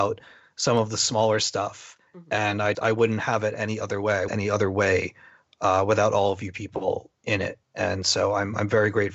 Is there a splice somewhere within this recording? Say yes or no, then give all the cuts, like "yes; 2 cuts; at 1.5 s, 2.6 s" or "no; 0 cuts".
yes; 4 cuts; at 2.1 s, 2.7 s, 4.3 s, 7.6 s